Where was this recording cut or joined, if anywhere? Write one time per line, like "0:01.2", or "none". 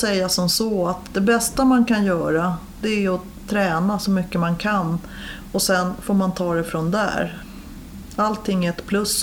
none

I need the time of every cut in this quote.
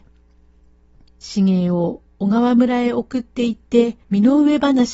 0:04.0

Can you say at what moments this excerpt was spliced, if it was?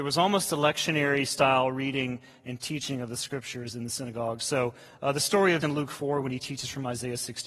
0:05.6

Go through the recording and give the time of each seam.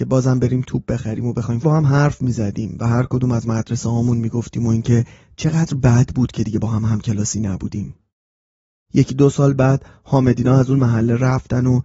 0:01.6

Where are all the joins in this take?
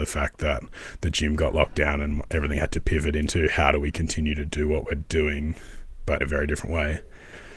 0:06.2

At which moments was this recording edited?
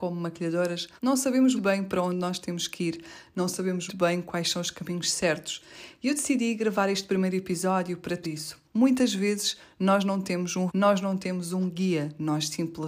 0:01.0
0:01.6
0:03.9
0:08.2
0:08.7
0:10.7

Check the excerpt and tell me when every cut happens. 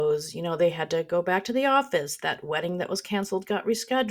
none

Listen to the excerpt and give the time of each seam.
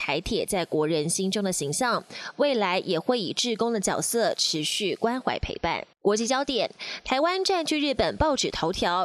0:05.9

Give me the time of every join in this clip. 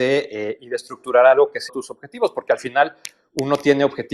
0:01.7

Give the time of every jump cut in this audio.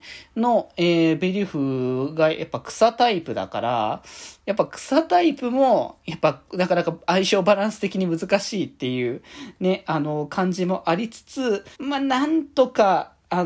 0:11.7

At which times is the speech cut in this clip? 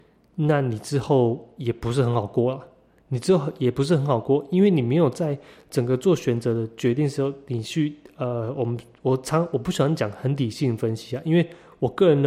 none

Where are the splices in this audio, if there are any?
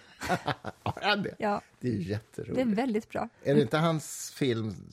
0:03.3

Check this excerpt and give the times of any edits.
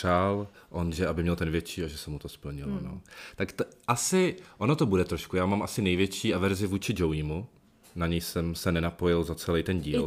none

